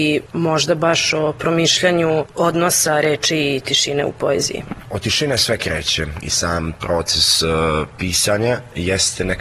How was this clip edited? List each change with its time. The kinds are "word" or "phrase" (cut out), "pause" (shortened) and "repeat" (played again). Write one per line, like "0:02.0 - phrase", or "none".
none